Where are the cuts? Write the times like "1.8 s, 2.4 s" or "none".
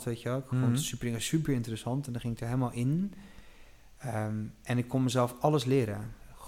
none